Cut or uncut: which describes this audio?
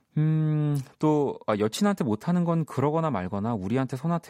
uncut